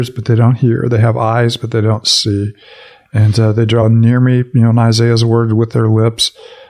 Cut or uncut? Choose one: uncut